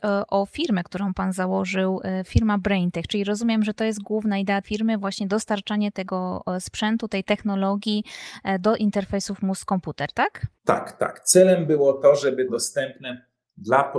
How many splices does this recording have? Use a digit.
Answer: 3